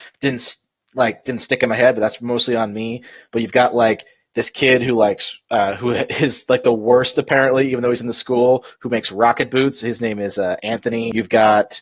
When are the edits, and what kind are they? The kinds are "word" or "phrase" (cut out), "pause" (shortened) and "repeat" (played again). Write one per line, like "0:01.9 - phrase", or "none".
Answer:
none